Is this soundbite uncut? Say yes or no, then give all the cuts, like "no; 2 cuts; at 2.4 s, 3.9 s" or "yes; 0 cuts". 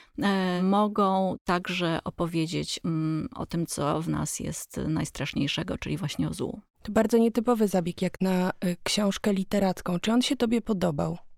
no; 1 cut; at 6.7 s